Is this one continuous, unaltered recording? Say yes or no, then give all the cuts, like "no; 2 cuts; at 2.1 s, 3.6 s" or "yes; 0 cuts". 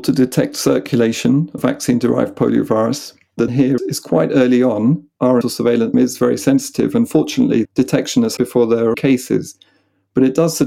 no; 8 cuts; at 1.6 s, 3.5 s, 3.8 s, 5.4 s, 5.9 s, 7.6 s, 8.4 s, 8.9 s